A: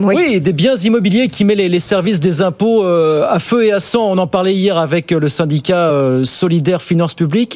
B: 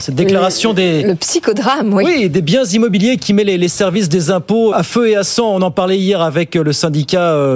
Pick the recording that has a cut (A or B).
B